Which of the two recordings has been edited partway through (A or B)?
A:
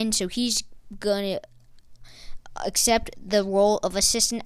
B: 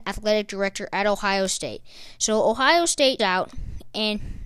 B